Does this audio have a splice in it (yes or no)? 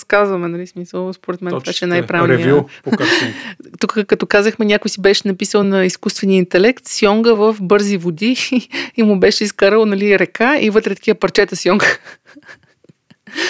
no